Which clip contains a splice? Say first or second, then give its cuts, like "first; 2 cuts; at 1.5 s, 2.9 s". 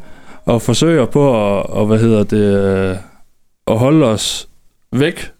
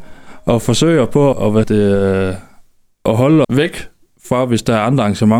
second; 3 cuts; at 1.3 s, 1.6 s, 3.4 s